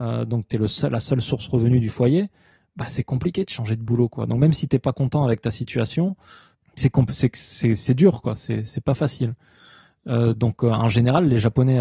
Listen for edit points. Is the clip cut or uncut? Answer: uncut